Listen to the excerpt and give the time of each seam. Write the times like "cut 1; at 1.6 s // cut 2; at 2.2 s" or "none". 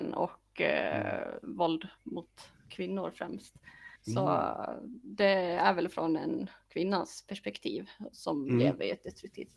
cut 1; at 4.0 s